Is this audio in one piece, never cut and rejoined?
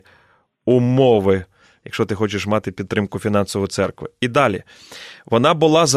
yes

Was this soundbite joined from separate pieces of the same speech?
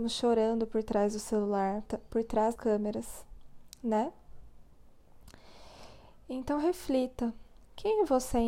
yes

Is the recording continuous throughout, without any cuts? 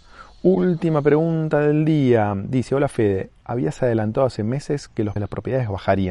no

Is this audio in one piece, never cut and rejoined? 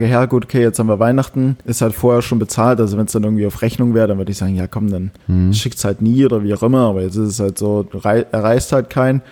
no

